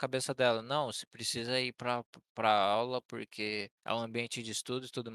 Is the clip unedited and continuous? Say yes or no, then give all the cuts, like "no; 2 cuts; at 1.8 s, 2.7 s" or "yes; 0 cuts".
no; 1 cut; at 3.8 s